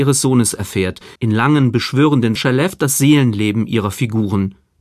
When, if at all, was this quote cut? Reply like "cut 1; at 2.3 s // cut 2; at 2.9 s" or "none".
cut 1; at 1.2 s // cut 2; at 2.4 s